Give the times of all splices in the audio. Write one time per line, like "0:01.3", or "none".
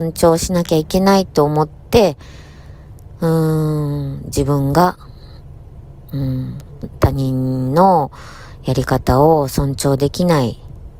0:06.8